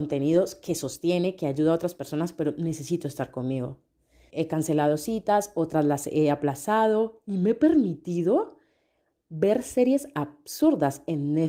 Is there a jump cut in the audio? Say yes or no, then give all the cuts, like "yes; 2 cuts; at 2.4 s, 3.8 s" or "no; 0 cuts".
yes; 1 cut; at 4.3 s